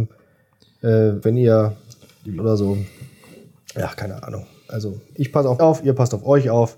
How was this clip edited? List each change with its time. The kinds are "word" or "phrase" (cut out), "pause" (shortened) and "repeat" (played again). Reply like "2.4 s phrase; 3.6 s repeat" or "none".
1.2 s word; 2.4 s word; 5.6 s word

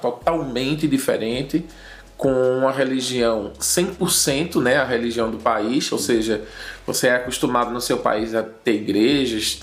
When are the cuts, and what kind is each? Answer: none

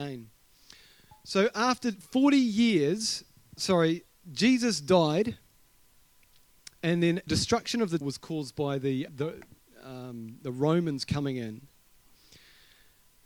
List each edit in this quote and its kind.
3.6 s word; 6.8 s pause; 7.3 s word; 8.0 s word; 9.1 s word

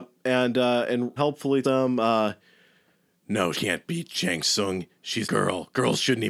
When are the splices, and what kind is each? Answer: 1.2 s word; 1.6 s word; 3.5 s word; 5.2 s word

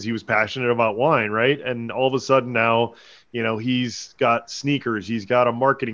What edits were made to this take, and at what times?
none

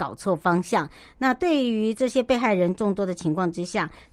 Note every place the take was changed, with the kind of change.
none

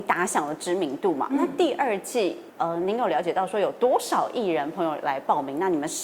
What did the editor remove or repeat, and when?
2.5 s pause

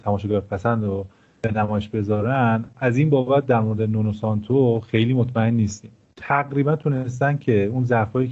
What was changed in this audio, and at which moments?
none

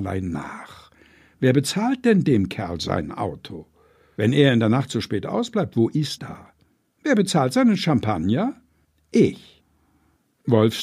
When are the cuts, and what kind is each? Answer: 6.2 s word

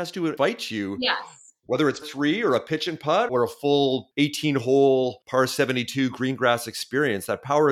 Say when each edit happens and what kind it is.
2.0 s word; 3.3 s word

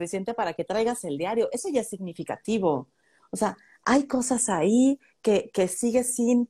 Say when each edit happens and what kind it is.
none

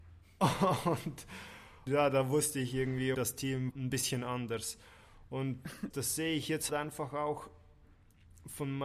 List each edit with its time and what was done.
1.9 s word; 3.1 s word; 3.7 s phrase; 5.9 s word; 6.7 s word

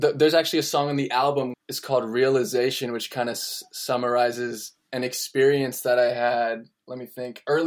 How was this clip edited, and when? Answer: 1.5 s word

